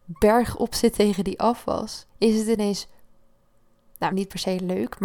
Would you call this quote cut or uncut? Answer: cut